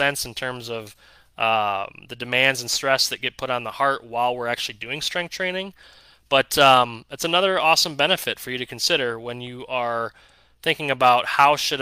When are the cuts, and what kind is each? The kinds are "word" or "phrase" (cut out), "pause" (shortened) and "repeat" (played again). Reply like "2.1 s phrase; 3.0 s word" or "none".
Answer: none